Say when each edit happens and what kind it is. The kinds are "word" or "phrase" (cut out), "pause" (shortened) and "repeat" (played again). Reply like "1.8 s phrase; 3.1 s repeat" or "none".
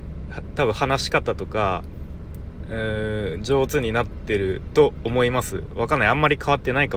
none

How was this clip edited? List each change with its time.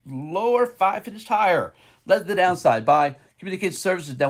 none

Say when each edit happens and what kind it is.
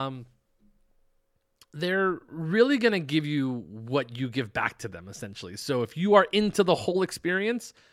none

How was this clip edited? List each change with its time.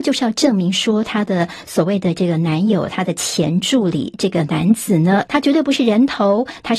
5.3 s phrase

